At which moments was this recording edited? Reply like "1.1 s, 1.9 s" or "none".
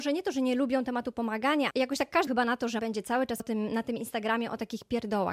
1.7 s, 2.3 s, 2.8 s, 3.4 s